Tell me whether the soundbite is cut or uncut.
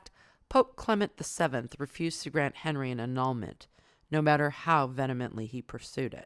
uncut